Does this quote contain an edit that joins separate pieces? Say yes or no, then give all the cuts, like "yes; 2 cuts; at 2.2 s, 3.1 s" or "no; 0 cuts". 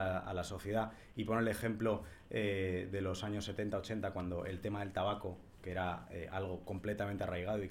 no; 0 cuts